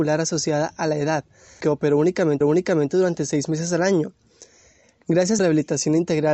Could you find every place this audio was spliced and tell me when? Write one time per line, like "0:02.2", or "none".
0:01.6
0:02.4
0:05.4